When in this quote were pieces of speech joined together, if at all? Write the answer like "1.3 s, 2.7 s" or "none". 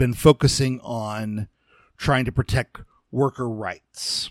none